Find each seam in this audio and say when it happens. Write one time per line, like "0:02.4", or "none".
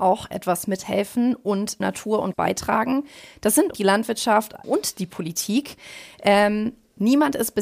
0:01.8
0:02.3
0:03.7
0:04.6